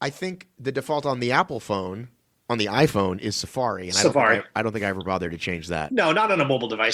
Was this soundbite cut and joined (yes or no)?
no